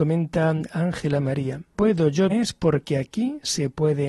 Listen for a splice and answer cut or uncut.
cut